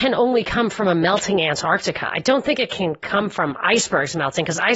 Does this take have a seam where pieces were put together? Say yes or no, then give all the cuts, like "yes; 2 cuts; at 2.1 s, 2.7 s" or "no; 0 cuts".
no; 0 cuts